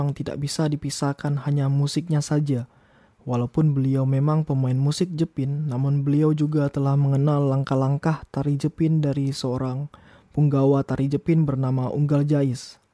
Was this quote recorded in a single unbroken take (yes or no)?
yes